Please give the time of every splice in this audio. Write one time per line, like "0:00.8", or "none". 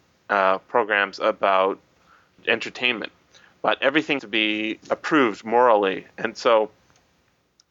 0:02.4
0:04.2
0:04.8